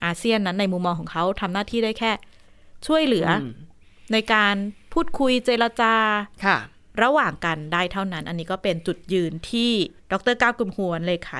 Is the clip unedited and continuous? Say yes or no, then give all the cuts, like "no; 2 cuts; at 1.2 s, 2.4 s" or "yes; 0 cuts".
no; 2 cuts; at 6.3 s, 10.0 s